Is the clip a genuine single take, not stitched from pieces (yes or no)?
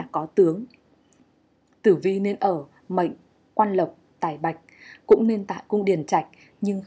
yes